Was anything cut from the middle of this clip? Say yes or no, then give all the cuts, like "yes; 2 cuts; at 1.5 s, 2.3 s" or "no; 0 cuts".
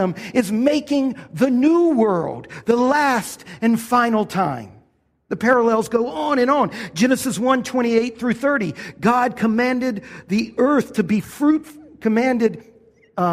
no; 0 cuts